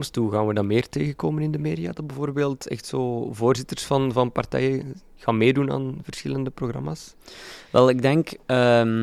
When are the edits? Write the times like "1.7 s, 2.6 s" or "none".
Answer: none